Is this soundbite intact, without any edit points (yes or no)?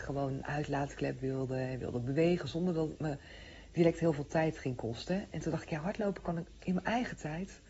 yes